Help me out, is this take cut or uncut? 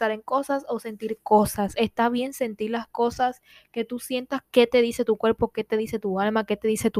uncut